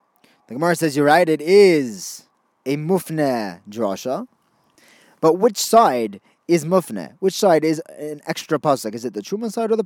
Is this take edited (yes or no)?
no